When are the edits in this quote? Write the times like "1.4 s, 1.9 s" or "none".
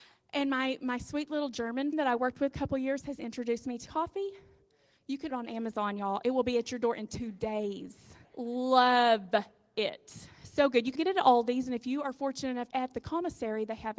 1.9 s, 2.5 s, 3.9 s, 5.3 s, 8.2 s, 11.0 s, 12.7 s